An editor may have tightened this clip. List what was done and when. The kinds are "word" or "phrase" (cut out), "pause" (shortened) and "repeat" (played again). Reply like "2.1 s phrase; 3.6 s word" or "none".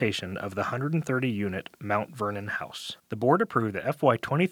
3.0 s pause

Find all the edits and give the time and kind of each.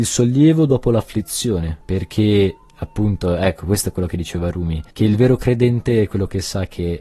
1.8 s pause; 4.9 s pause

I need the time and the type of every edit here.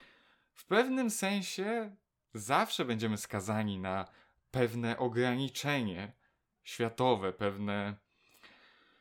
none

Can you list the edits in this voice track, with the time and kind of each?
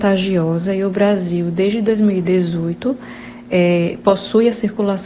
none

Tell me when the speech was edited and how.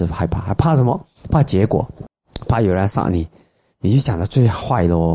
none

